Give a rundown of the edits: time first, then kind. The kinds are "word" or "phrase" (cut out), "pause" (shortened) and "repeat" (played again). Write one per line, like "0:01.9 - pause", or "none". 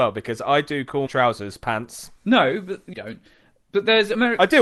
0:01.1 - word
0:02.2 - pause
0:02.9 - phrase

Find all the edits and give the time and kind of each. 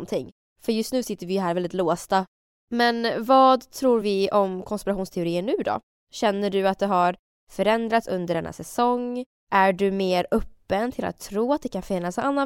none

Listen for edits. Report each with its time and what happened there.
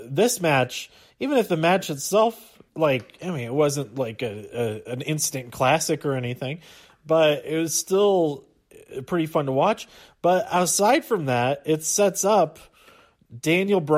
0:02.7 - pause

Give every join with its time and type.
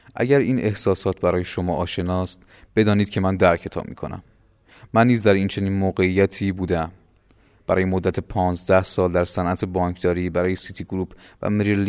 none

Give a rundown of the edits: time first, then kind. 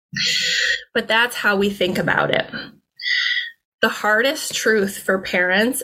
none

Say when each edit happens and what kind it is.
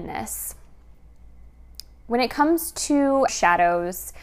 0:03.3 - word

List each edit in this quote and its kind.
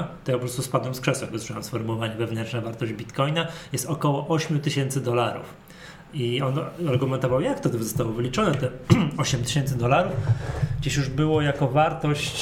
none

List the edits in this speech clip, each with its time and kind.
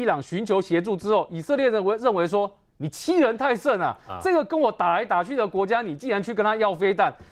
none

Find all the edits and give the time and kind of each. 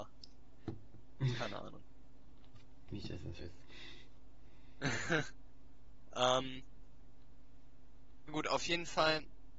0:03.4 - word
0:08.3 - word

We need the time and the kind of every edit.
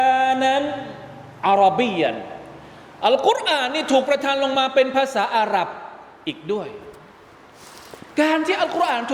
0:08.1 - pause

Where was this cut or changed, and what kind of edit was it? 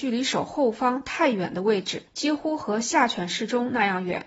0:02.1 - pause

